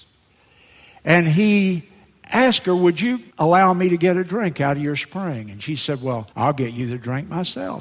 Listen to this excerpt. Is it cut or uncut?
cut